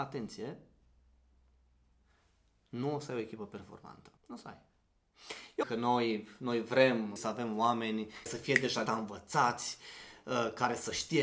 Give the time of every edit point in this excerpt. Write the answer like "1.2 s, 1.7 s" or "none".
4.2 s, 5.6 s, 7.2 s, 8.3 s, 8.9 s